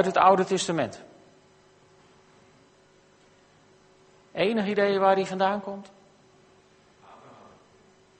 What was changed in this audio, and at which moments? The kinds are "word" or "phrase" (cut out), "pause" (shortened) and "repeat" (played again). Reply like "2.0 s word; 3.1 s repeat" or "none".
none